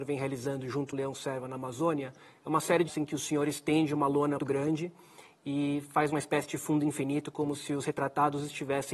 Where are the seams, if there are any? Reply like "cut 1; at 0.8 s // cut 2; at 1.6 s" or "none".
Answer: cut 1; at 0.9 s // cut 2; at 2.9 s // cut 3; at 4.4 s